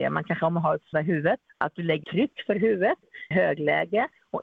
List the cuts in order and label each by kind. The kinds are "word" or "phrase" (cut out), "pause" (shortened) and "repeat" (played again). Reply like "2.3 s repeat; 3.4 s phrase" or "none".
0.9 s word; 1.5 s pause; 2.0 s word; 3.3 s phrase